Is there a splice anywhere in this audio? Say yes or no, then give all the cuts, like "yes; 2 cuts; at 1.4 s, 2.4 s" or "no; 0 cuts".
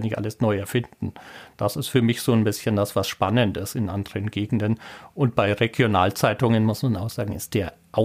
no; 0 cuts